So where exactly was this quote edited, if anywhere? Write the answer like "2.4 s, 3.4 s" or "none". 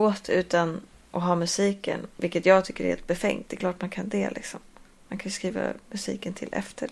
none